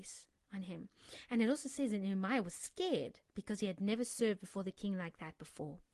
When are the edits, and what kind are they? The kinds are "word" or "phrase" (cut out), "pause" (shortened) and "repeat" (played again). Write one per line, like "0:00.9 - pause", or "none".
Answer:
0:03.3 - pause